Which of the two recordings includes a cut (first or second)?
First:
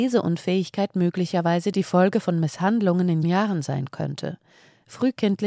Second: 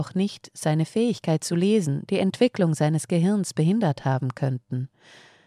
first